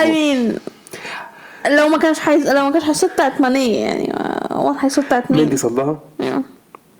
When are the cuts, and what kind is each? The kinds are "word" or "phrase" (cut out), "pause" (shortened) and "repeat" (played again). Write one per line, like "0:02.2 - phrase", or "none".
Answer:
none